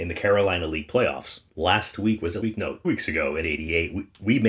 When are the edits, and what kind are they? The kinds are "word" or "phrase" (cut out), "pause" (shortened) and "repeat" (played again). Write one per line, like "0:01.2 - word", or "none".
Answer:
0:01.5 - pause
0:02.4 - word
0:02.8 - word
0:03.4 - word